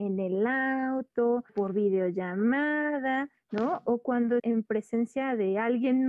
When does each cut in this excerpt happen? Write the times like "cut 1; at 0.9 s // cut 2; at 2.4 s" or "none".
cut 1; at 1.5 s // cut 2; at 4.4 s